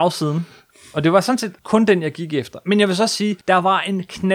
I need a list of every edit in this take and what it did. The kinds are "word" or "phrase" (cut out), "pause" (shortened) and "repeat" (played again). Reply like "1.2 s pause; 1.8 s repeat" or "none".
1.6 s pause; 3.4 s pause